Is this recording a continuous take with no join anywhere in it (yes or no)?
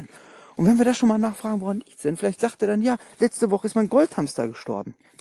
yes